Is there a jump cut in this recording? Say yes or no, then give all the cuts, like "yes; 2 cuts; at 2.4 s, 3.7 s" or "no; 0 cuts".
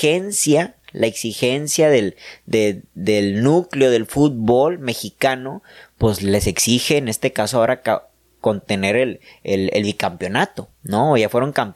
no; 0 cuts